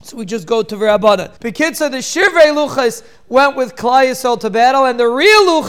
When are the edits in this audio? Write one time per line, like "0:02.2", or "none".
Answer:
0:01.4

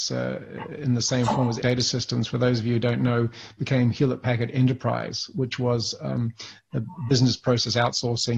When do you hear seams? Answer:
0:01.6

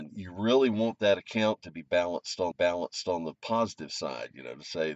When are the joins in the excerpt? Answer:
0:02.5

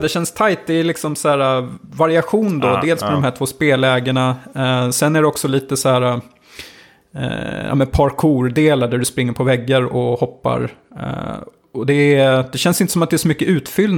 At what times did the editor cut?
none

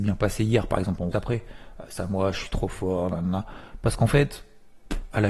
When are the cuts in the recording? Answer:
0:01.1
0:02.0

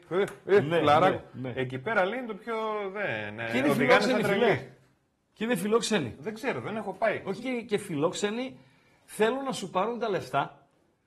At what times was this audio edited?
0:07.4

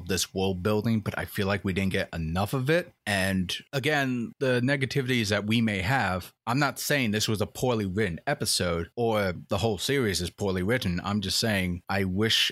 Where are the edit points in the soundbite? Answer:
none

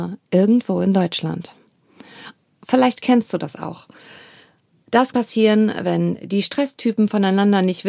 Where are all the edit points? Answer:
0:05.1

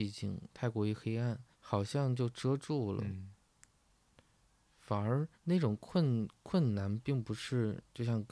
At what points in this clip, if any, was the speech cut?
0:01.5
0:05.3

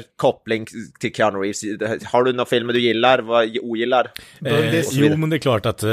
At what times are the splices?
none

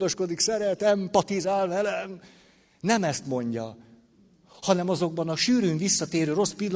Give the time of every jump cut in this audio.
none

